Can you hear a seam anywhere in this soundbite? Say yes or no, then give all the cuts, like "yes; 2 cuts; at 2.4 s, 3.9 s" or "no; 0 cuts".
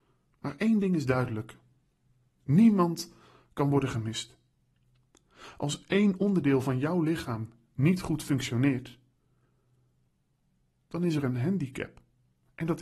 no; 0 cuts